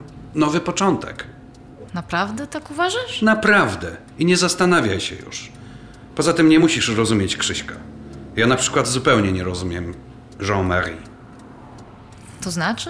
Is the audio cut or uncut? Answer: uncut